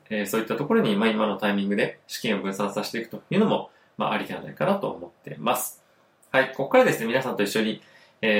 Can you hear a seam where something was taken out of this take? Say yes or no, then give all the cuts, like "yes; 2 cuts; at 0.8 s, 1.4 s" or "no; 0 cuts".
no; 0 cuts